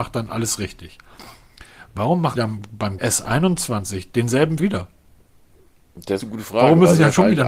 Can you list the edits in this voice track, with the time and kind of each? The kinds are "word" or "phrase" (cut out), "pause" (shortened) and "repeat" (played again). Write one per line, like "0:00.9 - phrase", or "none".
0:02.3 - word
0:03.0 - word
0:04.6 - word
0:06.2 - word